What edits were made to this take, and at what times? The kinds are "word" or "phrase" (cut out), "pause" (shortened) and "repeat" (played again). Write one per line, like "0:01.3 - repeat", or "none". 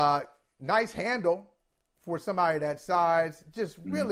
none